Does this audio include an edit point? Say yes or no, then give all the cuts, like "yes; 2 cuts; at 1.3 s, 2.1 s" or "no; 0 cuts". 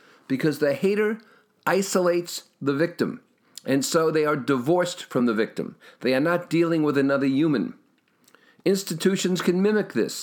no; 0 cuts